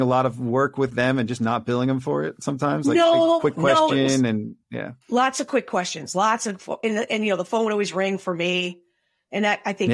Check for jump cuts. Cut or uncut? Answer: cut